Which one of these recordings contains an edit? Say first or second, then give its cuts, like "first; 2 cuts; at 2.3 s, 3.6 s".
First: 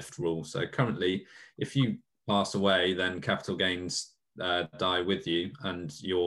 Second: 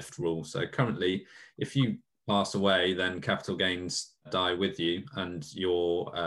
second; 1 cut; at 4.2 s